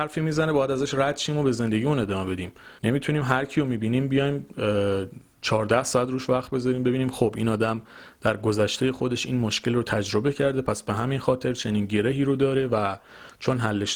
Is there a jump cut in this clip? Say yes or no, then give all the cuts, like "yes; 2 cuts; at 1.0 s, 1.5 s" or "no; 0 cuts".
yes; 1 cut; at 2.8 s